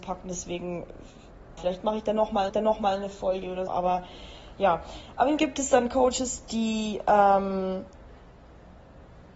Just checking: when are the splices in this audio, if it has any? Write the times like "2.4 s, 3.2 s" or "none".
1.6 s, 2.5 s, 3.7 s, 5.4 s